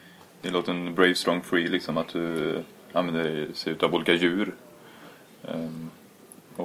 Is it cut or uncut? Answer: uncut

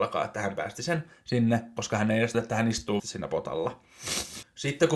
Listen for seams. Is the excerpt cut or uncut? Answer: cut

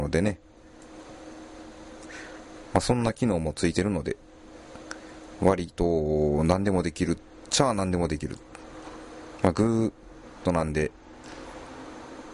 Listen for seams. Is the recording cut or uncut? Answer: cut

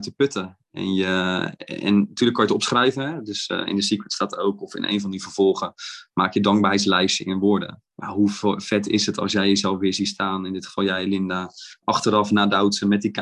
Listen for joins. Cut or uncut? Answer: cut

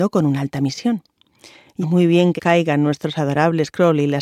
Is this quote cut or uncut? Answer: cut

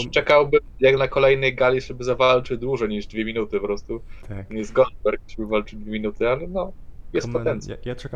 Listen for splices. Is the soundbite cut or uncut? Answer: cut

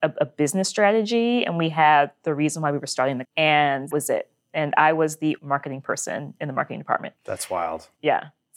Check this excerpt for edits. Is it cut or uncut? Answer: cut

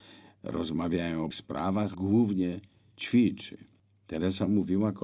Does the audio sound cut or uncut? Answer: cut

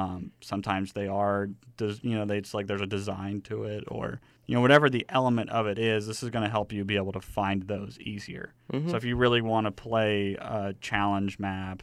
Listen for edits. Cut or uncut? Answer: cut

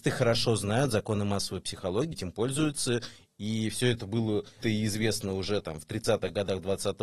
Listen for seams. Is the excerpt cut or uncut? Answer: cut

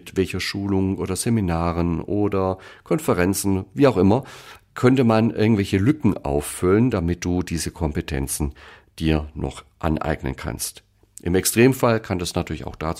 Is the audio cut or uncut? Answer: uncut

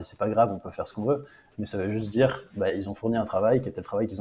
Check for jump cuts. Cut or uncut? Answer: uncut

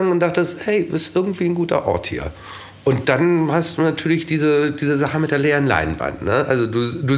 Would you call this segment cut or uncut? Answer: cut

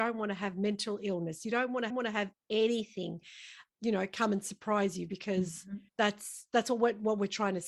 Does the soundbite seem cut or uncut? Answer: cut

